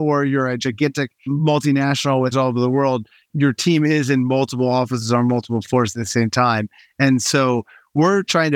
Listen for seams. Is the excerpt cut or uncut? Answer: cut